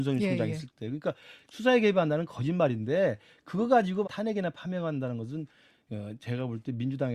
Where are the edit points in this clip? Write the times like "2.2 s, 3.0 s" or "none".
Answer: 4.0 s